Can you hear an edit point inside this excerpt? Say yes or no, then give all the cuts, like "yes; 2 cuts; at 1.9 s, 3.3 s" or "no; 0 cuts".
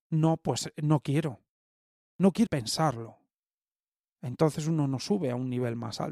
yes; 1 cut; at 2.5 s